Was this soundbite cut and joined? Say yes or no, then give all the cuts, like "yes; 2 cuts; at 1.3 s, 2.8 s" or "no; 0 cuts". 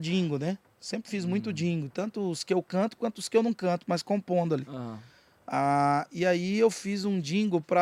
no; 0 cuts